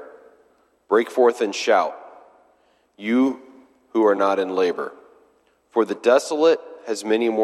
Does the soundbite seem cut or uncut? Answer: uncut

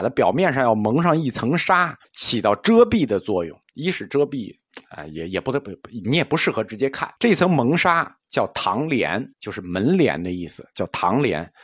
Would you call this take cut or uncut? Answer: cut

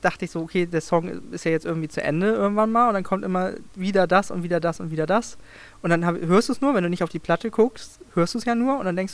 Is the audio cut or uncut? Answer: uncut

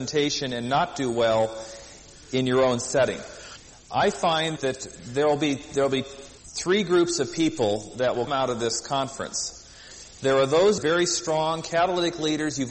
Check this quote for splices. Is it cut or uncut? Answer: cut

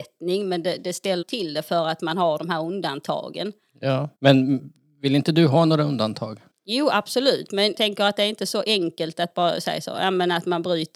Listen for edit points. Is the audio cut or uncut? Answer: cut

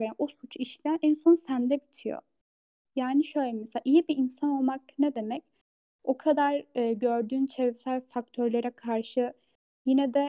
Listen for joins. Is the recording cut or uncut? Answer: uncut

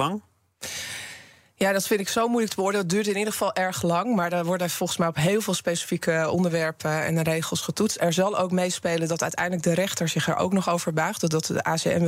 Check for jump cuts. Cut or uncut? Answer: uncut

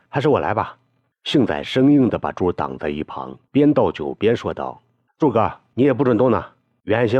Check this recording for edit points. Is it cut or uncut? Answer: cut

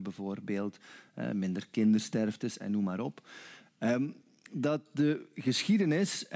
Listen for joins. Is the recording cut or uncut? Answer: uncut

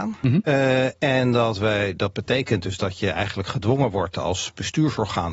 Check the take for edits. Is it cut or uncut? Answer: uncut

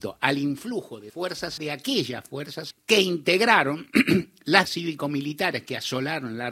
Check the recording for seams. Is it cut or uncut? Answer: cut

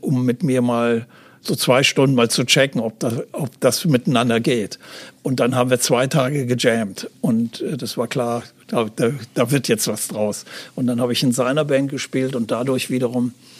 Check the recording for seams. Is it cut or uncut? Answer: uncut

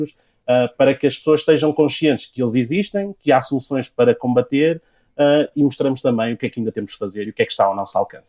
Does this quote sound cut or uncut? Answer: uncut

